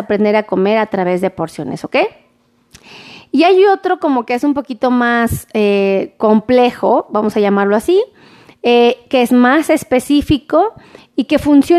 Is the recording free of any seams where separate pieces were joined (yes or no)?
yes